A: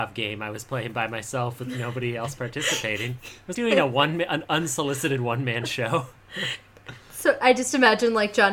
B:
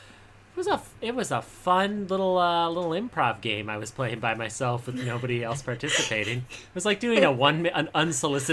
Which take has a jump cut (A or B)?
A